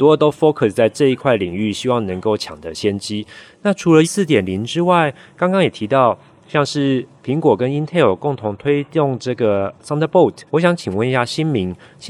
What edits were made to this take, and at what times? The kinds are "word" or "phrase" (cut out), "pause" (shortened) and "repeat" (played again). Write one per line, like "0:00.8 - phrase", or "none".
0:04.0 - word
0:10.5 - pause